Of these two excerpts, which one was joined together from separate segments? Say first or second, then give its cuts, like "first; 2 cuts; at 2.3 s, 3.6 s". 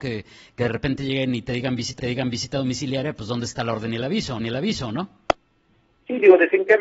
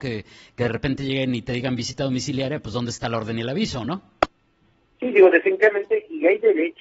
first; 2 cuts; at 2.0 s, 4.4 s